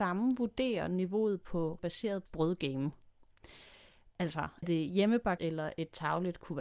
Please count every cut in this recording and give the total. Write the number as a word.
four